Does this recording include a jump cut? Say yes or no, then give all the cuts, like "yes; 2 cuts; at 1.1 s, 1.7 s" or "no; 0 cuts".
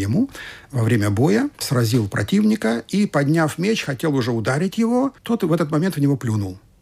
yes; 2 cuts; at 1.5 s, 5.2 s